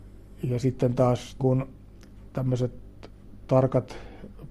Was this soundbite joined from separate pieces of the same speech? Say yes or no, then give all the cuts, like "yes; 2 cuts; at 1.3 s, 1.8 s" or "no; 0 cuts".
yes; 1 cut; at 1.4 s